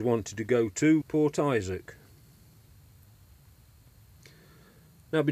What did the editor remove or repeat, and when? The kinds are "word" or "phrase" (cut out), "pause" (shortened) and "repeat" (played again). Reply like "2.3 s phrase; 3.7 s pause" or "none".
1.0 s word